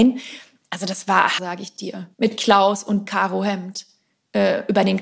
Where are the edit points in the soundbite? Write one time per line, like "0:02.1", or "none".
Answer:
0:01.4
0:02.1
0:03.1